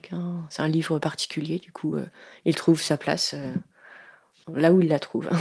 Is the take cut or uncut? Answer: uncut